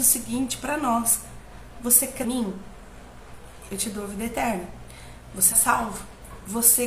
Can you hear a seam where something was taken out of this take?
yes; 2 cuts; at 2.2 s, 5.5 s

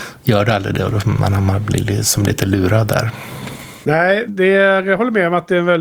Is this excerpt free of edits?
no; 1 cut; at 4.3 s

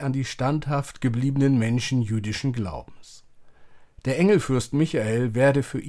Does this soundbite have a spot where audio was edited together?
no; 0 cuts

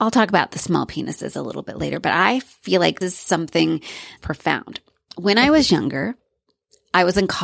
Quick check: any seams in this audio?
yes; 2 cuts; at 3.0 s, 4.2 s

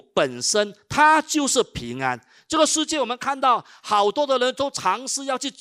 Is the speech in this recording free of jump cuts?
yes; 0 cuts

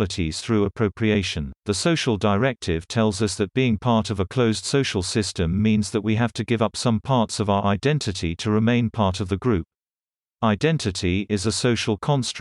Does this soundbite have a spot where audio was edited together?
yes; 1 cut; at 1.6 s

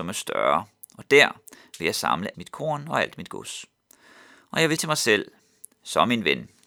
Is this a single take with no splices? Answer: no; 2 cuts; at 2.3 s, 4.8 s

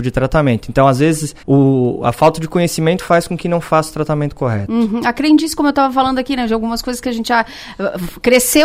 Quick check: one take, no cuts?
no; 1 cut; at 1.4 s

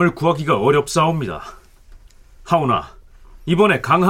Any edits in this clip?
no; 0 cuts

